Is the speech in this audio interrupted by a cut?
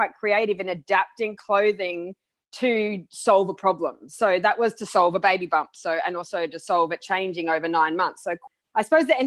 no; 0 cuts

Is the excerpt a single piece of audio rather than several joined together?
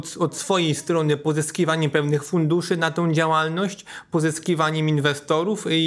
yes; 0 cuts

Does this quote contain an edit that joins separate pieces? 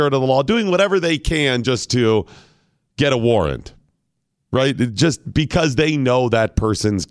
no; 0 cuts

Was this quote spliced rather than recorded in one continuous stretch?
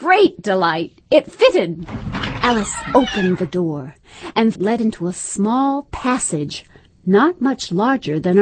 yes; 1 cut; at 4.6 s

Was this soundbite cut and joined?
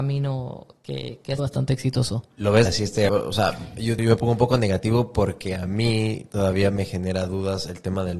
yes; 4 cuts; at 1.4 s, 2.7 s, 3.1 s, 4.0 s

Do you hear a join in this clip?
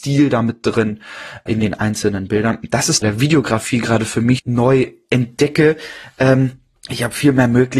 yes; 4 cuts; at 1.5 s, 3.0 s, 4.4 s, 6.8 s

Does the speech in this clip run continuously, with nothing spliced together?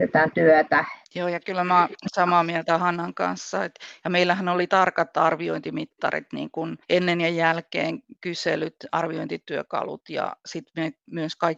no; 2 cuts; at 1.0 s, 6.8 s

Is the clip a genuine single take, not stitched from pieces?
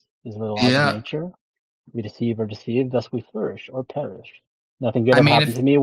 yes; 0 cuts

